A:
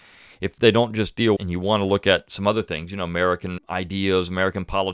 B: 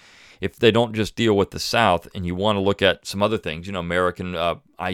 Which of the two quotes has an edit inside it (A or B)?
A